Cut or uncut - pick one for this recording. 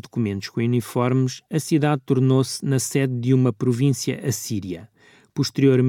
uncut